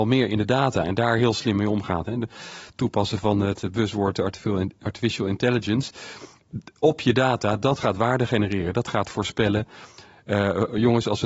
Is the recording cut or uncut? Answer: uncut